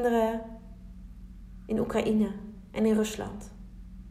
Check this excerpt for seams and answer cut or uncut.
uncut